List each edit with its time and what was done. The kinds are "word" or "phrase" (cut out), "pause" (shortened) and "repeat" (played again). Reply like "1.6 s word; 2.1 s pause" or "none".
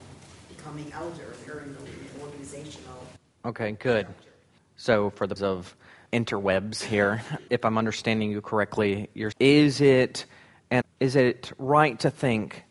0.9 s word; 1.5 s word; 1.9 s word; 5.4 s word; 6.1 s word; 7.5 s word; 9.3 s word; 10.8 s word